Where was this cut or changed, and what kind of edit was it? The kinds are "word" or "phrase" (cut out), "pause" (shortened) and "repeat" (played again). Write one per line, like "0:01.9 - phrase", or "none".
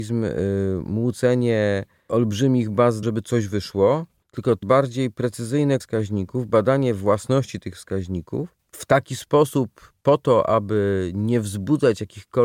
0:03.0 - phrase
0:04.2 - pause
0:04.6 - word
0:05.8 - word
0:08.6 - pause